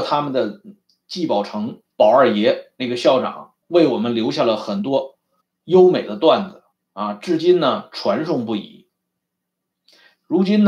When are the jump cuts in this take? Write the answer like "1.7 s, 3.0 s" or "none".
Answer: 1.9 s, 3.6 s, 5.4 s, 6.7 s